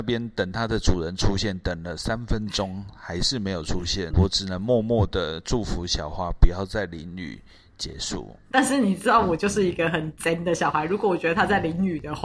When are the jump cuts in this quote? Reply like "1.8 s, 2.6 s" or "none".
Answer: 4.1 s, 8.5 s